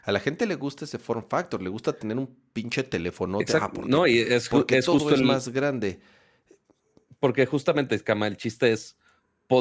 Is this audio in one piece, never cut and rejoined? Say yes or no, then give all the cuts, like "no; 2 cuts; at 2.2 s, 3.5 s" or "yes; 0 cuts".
yes; 0 cuts